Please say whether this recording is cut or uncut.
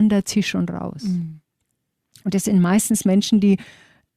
uncut